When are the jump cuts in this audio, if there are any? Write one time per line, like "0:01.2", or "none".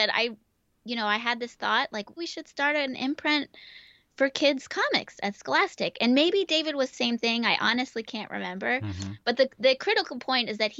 0:02.2
0:06.9